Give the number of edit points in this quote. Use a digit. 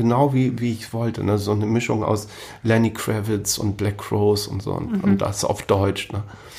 0